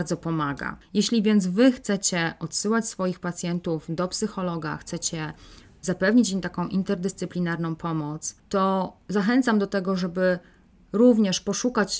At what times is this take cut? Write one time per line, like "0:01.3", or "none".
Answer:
none